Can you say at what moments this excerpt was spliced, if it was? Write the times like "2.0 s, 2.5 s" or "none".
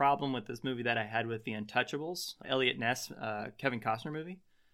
2.4 s

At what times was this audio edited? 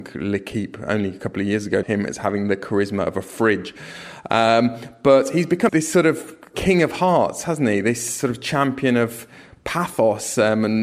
1.8 s, 5.7 s

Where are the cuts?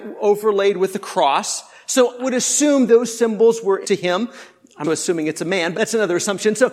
2.2 s, 2.9 s, 3.8 s, 4.8 s, 5.7 s

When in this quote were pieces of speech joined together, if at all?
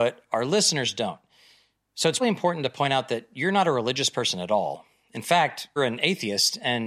2.2 s, 5.8 s

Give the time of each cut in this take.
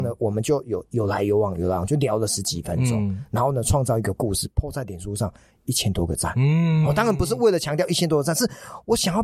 none

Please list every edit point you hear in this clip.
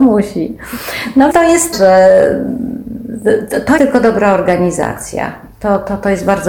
1.3 s, 1.7 s, 3.8 s

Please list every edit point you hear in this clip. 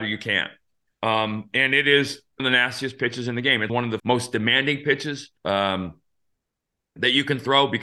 2.4 s, 3.7 s, 4.0 s, 5.4 s

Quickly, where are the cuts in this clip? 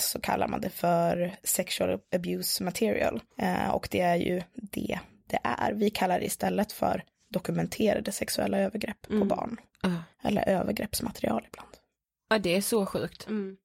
3.3 s, 10.1 s

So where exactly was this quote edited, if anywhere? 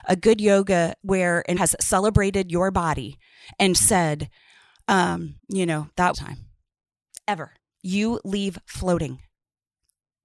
1.0 s, 1.6 s, 5.4 s, 6.1 s, 7.6 s

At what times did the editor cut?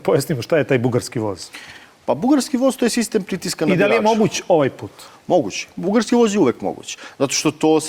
none

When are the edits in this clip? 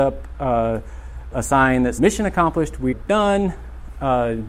1.3 s, 2.0 s, 2.9 s

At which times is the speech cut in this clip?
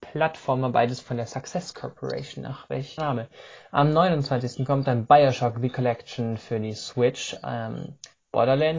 3.0 s

